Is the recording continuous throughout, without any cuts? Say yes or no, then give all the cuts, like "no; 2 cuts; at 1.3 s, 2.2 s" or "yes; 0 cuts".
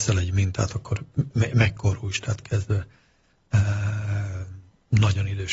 no; 2 cuts; at 1.3 s, 2.4 s